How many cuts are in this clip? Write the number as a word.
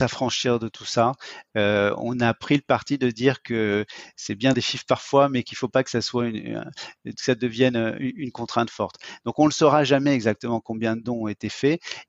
one